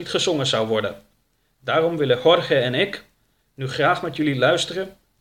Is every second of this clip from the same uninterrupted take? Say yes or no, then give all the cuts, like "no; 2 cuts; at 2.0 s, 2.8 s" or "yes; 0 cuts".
yes; 0 cuts